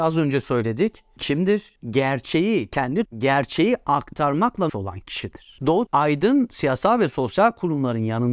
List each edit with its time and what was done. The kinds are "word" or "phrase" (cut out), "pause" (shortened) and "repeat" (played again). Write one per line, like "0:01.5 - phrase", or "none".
0:01.2 - word
0:03.0 - word
0:04.7 - word
0:05.9 - word

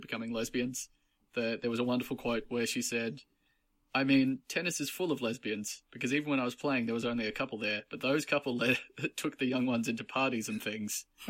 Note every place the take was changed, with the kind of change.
none

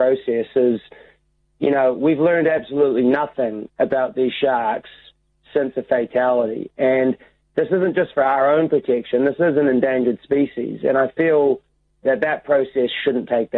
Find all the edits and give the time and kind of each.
none

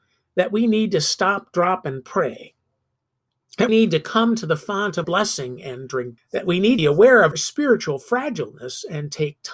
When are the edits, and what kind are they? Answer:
0:03.7 - word
0:05.0 - word
0:06.2 - word
0:06.8 - word
0:07.3 - word

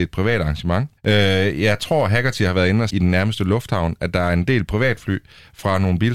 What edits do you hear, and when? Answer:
0:01.0 - pause
0:02.9 - word

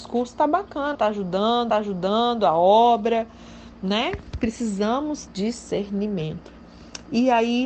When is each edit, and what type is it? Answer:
0:00.9 - phrase
0:01.7 - repeat
0:05.3 - word

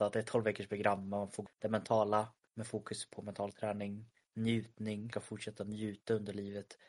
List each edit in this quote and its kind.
0:01.5 - word
0:02.5 - pause
0:05.1 - phrase

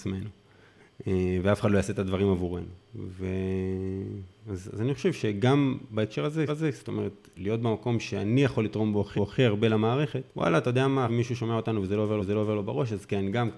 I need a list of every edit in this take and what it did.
0:06.5 - repeat
0:09.1 - repeat
0:10.3 - pause
0:11.1 - word
0:12.2 - repeat

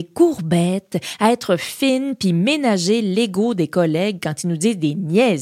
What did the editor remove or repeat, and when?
none

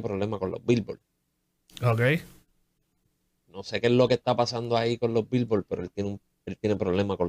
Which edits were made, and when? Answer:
none

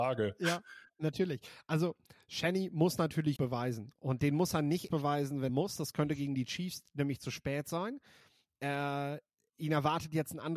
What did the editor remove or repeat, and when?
0:03.4 - word
0:04.9 - word
0:05.5 - word

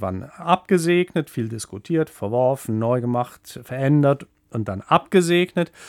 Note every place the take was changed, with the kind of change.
none

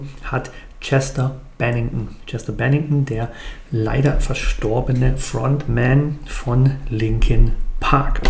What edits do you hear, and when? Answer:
none

